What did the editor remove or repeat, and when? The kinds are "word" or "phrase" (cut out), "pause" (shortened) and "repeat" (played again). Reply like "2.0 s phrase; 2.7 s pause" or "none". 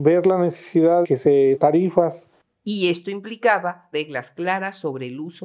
1.0 s word; 1.5 s word; 3.9 s word